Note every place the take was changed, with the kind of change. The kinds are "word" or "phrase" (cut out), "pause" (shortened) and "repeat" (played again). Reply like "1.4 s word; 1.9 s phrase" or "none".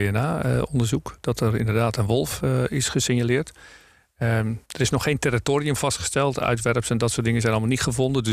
4.6 s pause